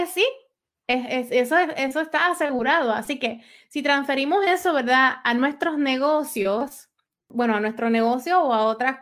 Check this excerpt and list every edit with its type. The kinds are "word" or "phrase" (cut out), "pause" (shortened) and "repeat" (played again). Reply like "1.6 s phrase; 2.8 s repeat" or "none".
none